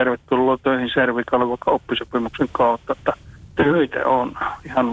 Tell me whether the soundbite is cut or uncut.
cut